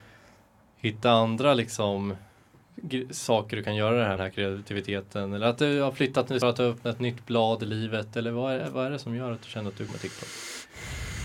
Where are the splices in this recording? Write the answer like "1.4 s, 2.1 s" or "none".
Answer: 4.2 s, 6.4 s, 9.9 s